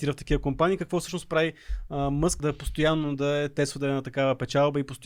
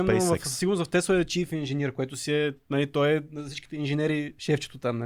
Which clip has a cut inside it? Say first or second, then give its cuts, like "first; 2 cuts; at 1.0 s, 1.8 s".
first; 1 cut; at 2.4 s